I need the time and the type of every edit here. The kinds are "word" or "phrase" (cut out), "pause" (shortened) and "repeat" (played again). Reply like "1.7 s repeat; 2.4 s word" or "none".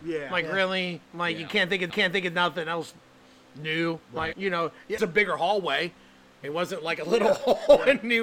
1.0 s pause; 1.9 s repeat; 4.0 s pause; 4.3 s word; 5.0 s phrase